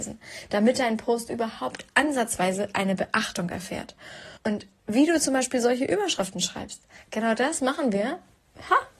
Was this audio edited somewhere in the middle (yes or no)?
yes